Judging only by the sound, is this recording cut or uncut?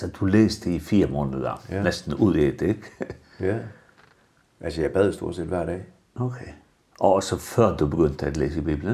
uncut